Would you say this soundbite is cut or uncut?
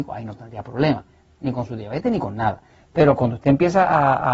uncut